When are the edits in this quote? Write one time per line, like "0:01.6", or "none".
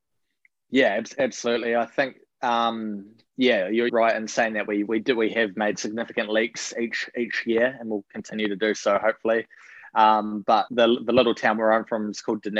0:03.9
0:10.7

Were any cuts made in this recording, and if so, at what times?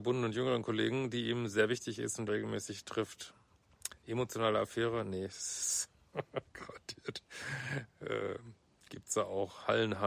0:02.3

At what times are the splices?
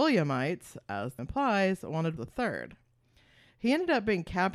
0:01.2
0:02.2

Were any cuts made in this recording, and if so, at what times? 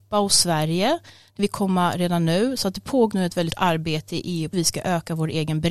0:01.4
0:03.1
0:03.5
0:04.5

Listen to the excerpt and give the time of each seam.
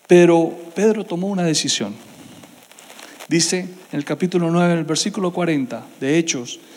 0:03.8

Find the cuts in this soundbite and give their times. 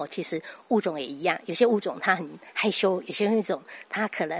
none

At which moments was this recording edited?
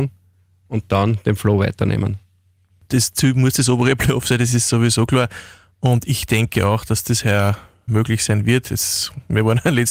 0:07.9

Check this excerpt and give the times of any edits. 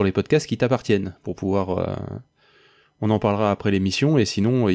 none

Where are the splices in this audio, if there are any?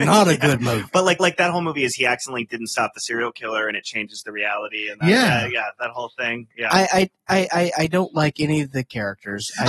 0:01.2

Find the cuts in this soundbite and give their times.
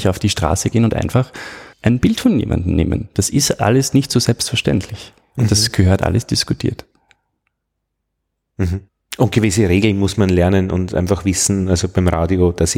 0:01.7
0:08.9

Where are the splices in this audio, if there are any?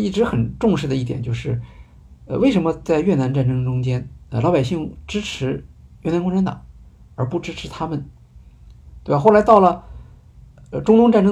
none

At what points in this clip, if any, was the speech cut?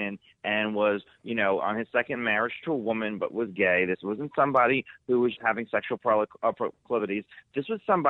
0:05.4
0:06.0

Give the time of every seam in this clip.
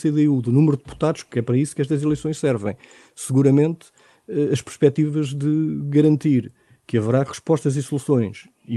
none

